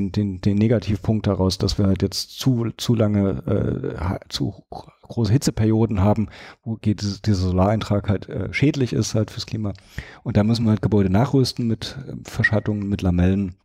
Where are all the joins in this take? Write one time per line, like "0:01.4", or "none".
none